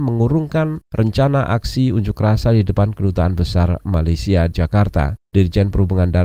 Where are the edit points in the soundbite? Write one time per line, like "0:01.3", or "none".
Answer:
0:04.5